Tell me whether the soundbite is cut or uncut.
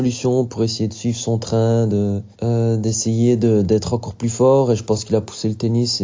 cut